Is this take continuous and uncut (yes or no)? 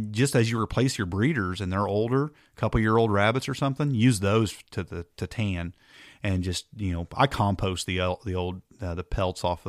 yes